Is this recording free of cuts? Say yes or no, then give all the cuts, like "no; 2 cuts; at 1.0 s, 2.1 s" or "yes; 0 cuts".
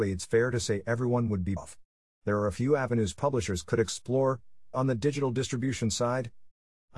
no; 2 cuts; at 1.6 s, 4.7 s